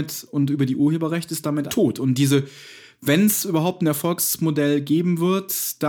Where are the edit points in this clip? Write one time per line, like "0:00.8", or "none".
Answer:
0:01.7